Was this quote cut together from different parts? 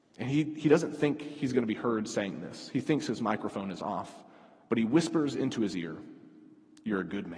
no; 0 cuts

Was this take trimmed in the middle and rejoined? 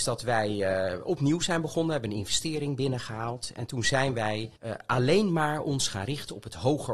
yes; 1 cut; at 4.6 s

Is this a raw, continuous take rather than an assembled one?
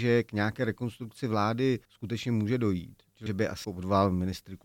no; 3 cuts; at 1.8 s, 3.3 s, 3.6 s

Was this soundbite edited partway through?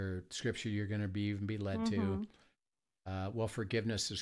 no; 0 cuts

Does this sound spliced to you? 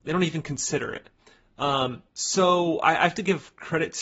yes; 1 cut; at 2.1 s

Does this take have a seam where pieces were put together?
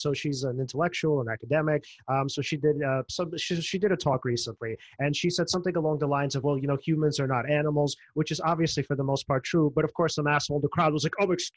no; 0 cuts

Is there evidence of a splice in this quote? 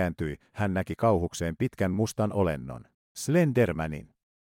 no; 0 cuts

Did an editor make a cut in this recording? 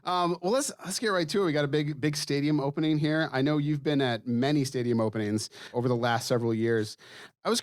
yes; 1 cut; at 5.7 s

